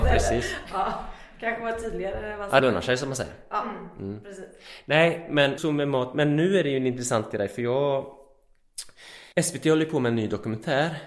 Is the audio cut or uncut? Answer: cut